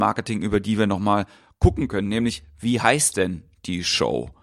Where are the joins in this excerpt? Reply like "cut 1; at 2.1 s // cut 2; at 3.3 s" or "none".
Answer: none